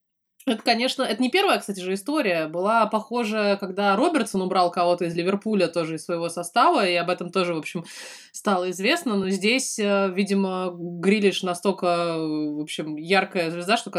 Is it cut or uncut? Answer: uncut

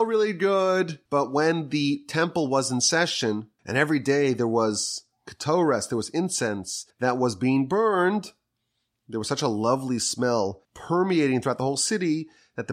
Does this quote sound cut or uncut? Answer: cut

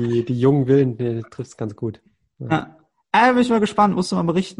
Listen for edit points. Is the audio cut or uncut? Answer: uncut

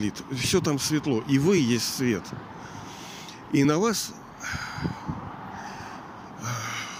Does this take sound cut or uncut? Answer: uncut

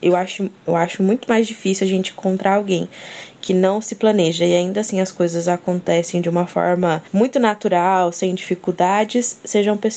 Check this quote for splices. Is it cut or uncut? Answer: cut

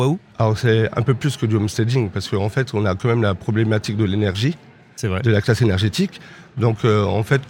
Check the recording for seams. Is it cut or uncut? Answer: uncut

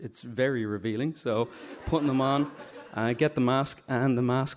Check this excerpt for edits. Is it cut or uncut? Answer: uncut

